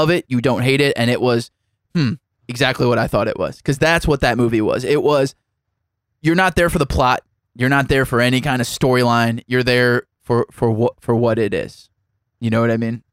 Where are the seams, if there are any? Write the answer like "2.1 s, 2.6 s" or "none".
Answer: none

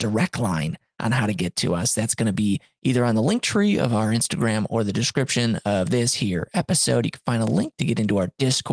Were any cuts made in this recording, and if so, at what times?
none

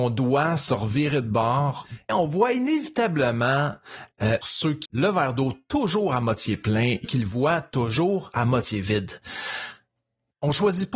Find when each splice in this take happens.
2.1 s, 4.4 s, 4.8 s, 7.0 s

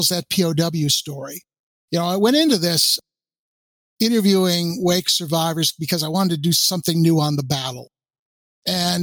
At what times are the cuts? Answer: none

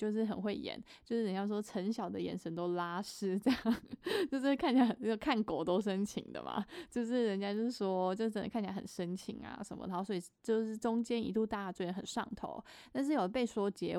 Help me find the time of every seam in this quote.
none

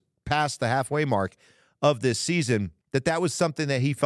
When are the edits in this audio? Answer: 2.8 s

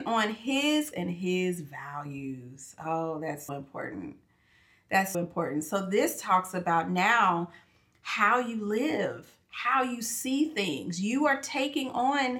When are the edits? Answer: 0.9 s, 3.5 s, 5.1 s

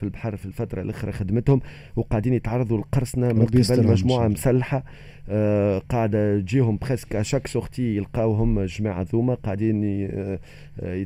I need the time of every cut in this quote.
none

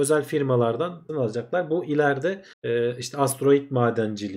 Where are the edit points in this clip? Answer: 1.1 s, 2.5 s

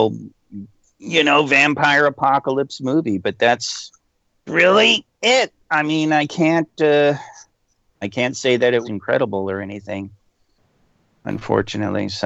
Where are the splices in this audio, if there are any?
4.5 s, 8.0 s, 8.8 s

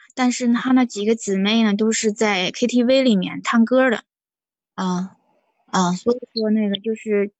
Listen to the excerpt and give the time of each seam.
none

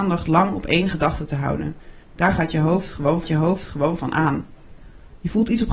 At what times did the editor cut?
2.0 s, 3.2 s

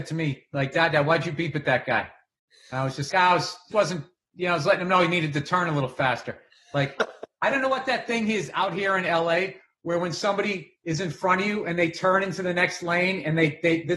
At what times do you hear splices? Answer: 3.1 s, 3.7 s

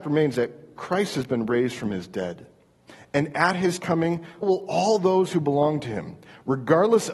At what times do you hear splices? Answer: 4.4 s

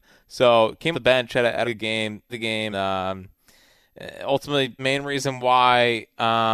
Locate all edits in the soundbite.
0.9 s, 1.6 s, 2.3 s, 2.7 s, 4.8 s

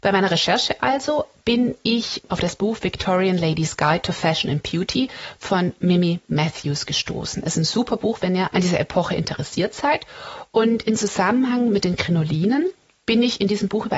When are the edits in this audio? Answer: none

